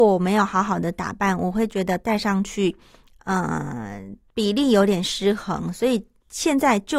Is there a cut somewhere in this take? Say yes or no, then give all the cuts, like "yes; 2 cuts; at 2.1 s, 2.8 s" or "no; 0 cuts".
no; 0 cuts